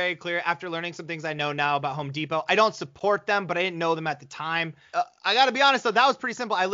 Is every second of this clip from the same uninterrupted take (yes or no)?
yes